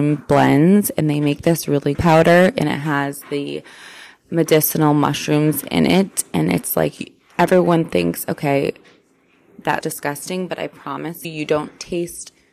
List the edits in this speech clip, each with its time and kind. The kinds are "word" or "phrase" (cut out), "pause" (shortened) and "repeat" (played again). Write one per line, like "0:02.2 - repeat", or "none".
0:01.9 - phrase
0:09.8 - word
0:11.2 - word

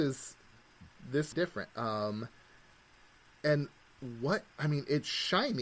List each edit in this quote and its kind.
0:01.3 - phrase

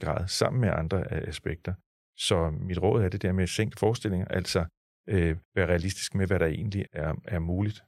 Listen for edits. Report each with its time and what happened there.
0:03.7 - phrase
0:05.4 - pause
0:06.9 - word

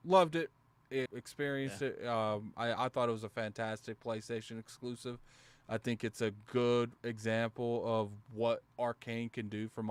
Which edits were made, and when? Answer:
0:01.1 - word

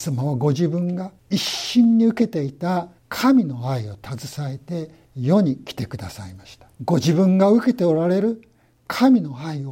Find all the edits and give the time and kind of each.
0:01.2 - pause
0:03.0 - pause
0:05.0 - pause
0:06.7 - pause

